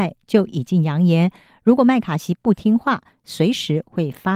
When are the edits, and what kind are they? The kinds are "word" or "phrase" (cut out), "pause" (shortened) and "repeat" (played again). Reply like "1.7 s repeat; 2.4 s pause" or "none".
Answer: none